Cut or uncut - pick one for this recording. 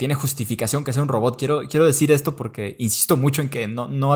uncut